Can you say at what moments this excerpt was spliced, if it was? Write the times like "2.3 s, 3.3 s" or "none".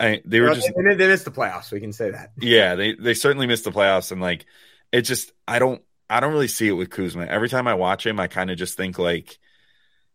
none